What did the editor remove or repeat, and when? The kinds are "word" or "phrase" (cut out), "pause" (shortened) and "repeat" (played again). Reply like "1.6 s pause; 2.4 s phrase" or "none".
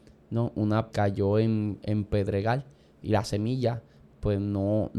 0.9 s word